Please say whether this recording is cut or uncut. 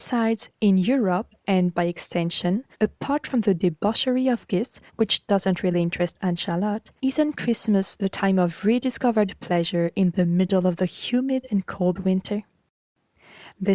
cut